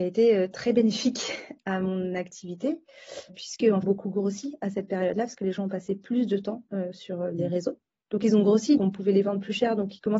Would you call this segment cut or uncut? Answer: cut